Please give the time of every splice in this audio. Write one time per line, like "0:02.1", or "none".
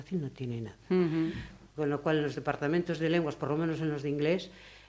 none